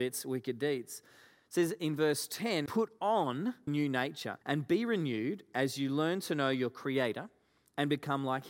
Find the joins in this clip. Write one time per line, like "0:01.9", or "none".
0:02.7
0:03.7
0:04.4